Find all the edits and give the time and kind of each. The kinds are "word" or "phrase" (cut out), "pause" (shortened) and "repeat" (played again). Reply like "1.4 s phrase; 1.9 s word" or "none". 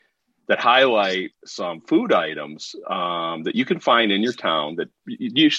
1.4 s pause